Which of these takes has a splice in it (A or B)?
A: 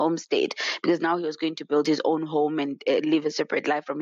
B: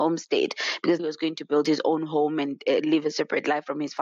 B